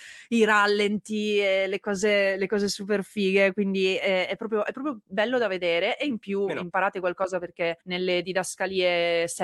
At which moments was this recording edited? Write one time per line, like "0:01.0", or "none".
0:07.8